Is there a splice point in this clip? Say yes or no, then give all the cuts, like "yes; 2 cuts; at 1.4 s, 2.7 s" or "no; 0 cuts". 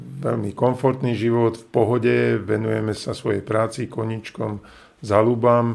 no; 0 cuts